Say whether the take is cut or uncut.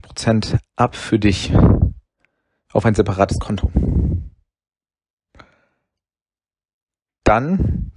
uncut